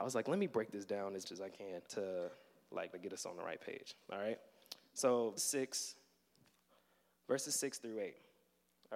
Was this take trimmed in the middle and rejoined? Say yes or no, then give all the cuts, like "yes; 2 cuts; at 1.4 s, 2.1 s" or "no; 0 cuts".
yes; 4 cuts; at 1.2 s, 1.9 s, 2.9 s, 5.4 s